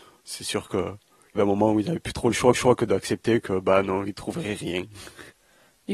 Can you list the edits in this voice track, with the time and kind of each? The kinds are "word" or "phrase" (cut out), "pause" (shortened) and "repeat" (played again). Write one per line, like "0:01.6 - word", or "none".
0:01.4 - word
0:02.5 - repeat